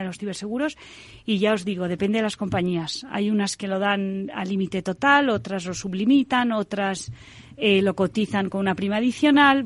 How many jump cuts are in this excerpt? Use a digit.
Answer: 0